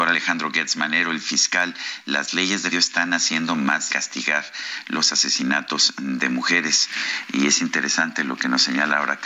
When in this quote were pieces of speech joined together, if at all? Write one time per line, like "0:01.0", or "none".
0:02.7
0:03.9